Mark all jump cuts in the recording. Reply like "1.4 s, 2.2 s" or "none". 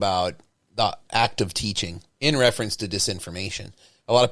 2.1 s

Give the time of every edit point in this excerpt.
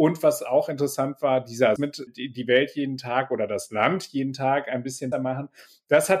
1.8 s, 2.1 s, 5.1 s

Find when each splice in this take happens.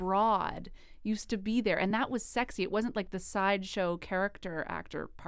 none

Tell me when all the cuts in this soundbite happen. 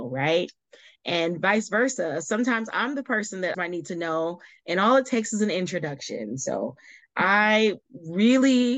3.5 s

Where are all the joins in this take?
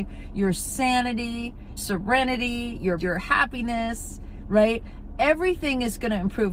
1.8 s, 3.0 s

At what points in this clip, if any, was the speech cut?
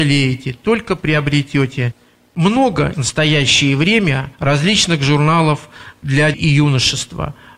2.9 s, 4.3 s, 6.3 s

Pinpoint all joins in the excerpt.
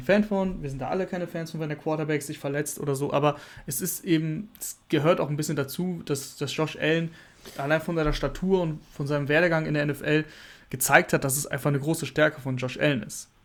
none

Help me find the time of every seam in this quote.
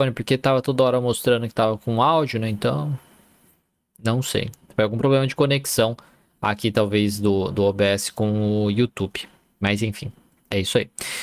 none

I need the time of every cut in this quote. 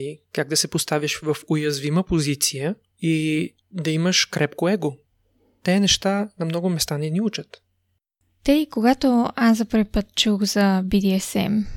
none

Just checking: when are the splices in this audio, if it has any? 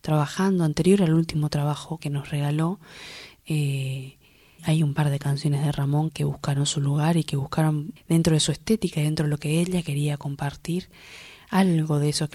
2.0 s, 4.6 s, 6.1 s, 8.0 s

